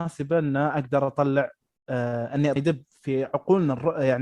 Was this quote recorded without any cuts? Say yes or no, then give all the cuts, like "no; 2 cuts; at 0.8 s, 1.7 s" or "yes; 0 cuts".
no; 1 cut; at 2.6 s